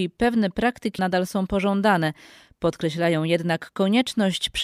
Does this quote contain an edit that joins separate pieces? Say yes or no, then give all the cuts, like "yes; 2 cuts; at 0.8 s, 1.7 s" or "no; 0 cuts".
yes; 1 cut; at 1.0 s